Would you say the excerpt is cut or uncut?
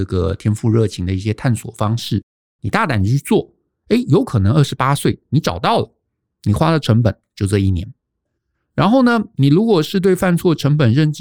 uncut